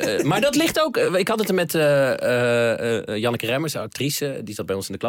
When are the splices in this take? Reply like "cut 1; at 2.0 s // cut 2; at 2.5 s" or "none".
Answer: none

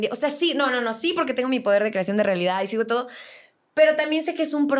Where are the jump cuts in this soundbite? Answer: none

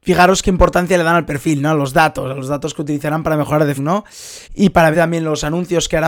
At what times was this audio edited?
cut 1; at 3.8 s // cut 2; at 4.4 s // cut 3; at 4.9 s

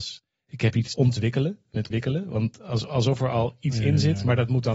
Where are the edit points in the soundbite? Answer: cut 1; at 0.9 s // cut 2; at 1.9 s

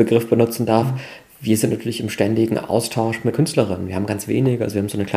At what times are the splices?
cut 1; at 3.3 s

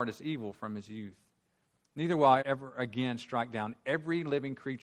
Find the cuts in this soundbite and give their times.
cut 1; at 2.4 s

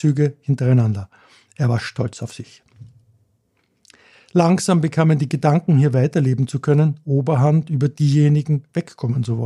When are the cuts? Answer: none

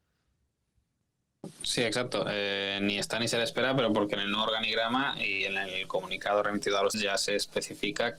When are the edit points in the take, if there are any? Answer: cut 1; at 1.5 s // cut 2; at 6.9 s

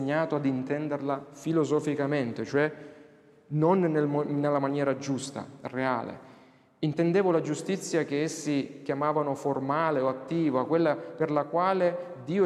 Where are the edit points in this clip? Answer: none

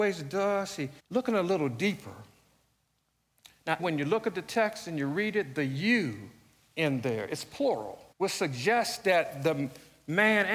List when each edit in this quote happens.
cut 1; at 1.0 s // cut 2; at 3.8 s // cut 3; at 8.1 s

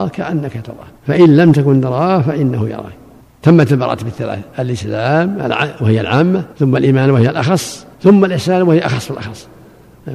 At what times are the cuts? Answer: cut 1; at 1.0 s // cut 2; at 3.2 s // cut 3; at 6.5 s // cut 4; at 7.9 s

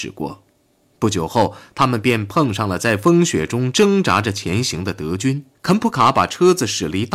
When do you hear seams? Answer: cut 1; at 5.5 s

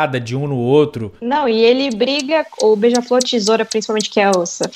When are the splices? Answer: cut 1; at 1.2 s

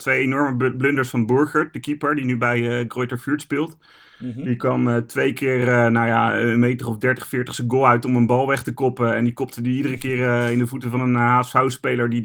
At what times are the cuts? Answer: none

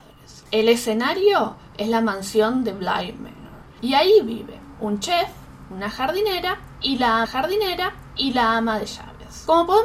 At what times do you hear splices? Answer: cut 1; at 7.2 s

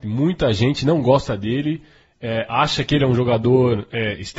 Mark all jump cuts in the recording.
none

